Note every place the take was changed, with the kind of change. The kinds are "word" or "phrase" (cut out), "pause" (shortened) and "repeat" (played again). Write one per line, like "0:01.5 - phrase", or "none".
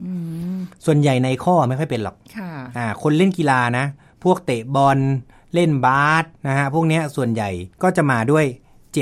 0:02.2 - pause
0:06.4 - pause
0:07.7 - pause